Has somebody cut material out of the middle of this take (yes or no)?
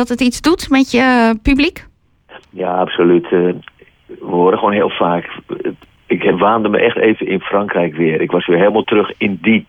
no